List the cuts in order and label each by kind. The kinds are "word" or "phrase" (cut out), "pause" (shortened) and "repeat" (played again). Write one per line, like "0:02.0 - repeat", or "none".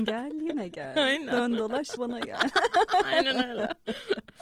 0:02.0 - word